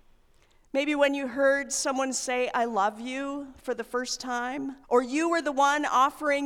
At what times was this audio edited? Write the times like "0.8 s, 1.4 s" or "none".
4.8 s